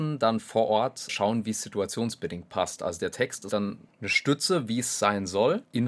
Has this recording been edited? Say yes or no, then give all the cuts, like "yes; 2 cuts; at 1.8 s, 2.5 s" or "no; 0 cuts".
yes; 1 cut; at 3.5 s